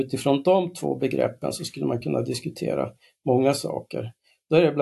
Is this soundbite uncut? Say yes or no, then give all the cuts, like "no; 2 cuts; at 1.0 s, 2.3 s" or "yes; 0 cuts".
yes; 0 cuts